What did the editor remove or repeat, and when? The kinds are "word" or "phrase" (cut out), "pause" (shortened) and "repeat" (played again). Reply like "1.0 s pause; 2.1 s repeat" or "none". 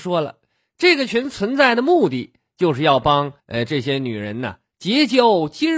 3.4 s pause